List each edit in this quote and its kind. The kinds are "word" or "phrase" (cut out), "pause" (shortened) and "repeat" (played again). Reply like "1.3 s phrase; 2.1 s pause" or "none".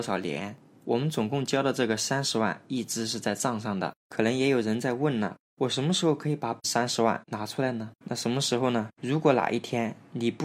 8.0 s pause